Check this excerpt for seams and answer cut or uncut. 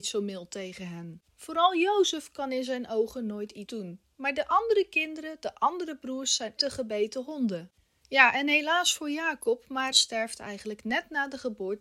cut